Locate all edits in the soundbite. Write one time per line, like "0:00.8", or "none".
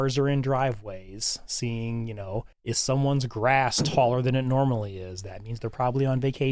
0:02.5

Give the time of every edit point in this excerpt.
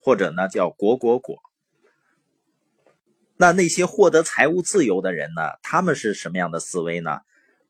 none

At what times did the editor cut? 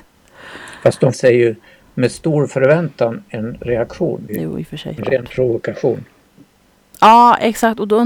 0:01.1
0:04.3
0:05.0

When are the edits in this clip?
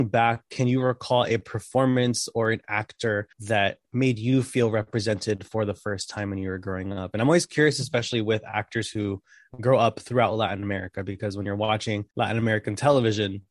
0:03.3
0:12.1

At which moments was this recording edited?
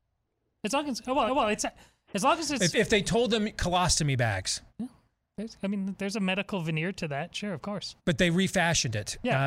0:01.3
0:04.7
0:08.0

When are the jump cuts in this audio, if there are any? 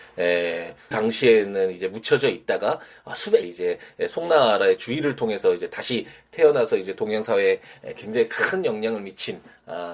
0:00.9
0:03.4

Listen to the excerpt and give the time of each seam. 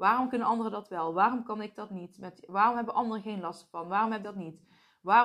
0:04.2

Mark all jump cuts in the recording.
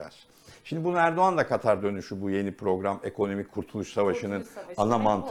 none

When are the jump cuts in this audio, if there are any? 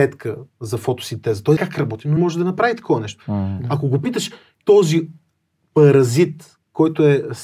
0:01.6
0:02.2
0:04.6

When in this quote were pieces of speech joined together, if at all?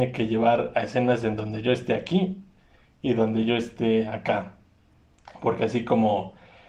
none

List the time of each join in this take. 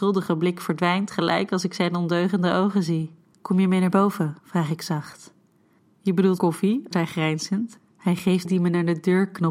0:03.3
0:04.4
0:05.8
0:06.4
0:06.9
0:08.4

